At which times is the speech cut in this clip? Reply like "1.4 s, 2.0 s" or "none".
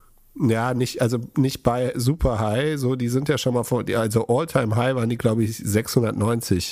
none